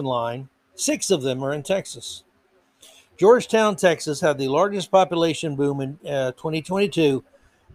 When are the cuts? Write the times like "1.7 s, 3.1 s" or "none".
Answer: none